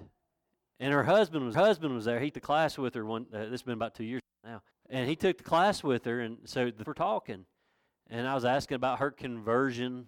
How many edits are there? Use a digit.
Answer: 4